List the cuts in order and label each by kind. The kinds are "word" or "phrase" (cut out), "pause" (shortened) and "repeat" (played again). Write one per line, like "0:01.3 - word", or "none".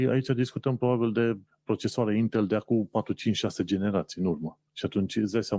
0:01.5 - pause
0:04.7 - pause